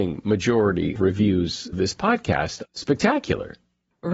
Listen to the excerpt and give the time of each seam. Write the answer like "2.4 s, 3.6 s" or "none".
1.0 s, 1.7 s, 2.6 s

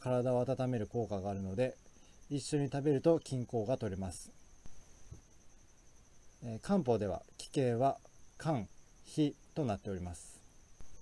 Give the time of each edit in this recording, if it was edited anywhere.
6.4 s

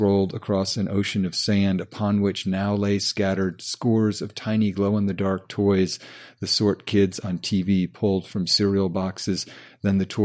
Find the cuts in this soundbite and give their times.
none

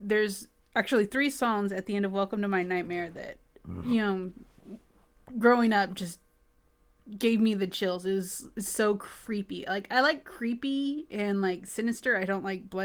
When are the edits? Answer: none

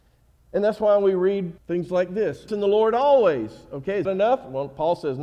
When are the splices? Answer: 1.6 s, 2.5 s, 4.0 s

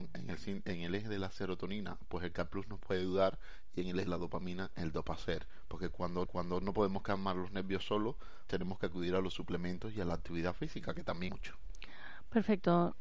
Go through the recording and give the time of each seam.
4.1 s, 6.3 s, 8.5 s, 11.3 s

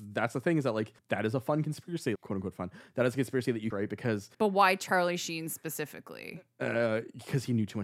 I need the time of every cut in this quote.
1.0 s, 2.2 s, 3.7 s, 4.3 s

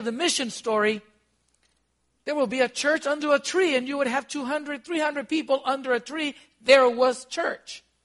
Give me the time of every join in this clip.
none

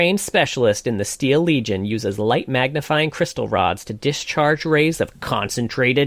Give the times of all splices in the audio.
none

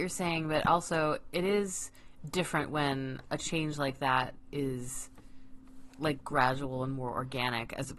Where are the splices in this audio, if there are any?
none

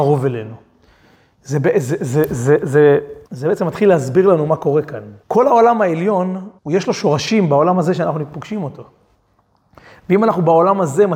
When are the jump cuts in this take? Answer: 3.3 s, 5.2 s, 6.6 s

